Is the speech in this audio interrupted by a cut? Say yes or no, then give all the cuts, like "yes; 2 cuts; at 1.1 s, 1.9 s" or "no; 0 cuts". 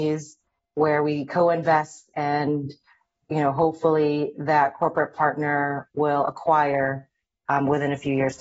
no; 0 cuts